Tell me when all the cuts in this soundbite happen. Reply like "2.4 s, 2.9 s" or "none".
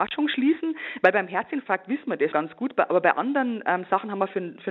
2.3 s